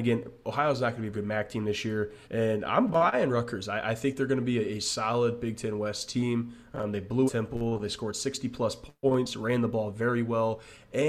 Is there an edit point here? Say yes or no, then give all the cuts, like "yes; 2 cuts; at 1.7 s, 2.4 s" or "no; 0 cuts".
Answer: yes; 3 cuts; at 1.1 s, 2.2 s, 7.3 s